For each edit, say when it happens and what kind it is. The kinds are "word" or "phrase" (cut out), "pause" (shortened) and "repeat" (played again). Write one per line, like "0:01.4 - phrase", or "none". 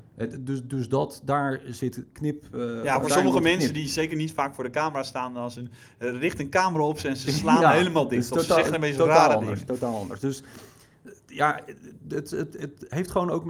none